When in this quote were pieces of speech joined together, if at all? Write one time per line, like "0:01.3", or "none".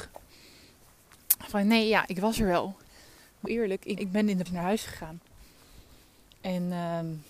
0:03.5
0:04.0
0:04.5